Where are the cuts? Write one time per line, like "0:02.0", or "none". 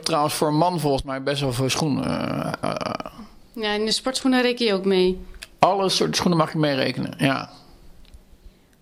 none